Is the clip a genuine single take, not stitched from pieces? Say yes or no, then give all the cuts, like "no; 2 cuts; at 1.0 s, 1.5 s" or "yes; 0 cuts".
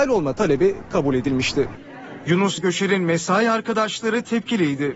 no; 1 cut; at 2.6 s